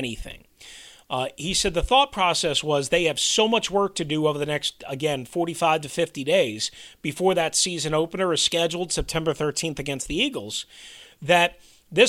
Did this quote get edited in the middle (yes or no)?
no